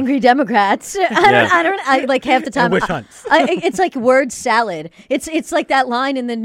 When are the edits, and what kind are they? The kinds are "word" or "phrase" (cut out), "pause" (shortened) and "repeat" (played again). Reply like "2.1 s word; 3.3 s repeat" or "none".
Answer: none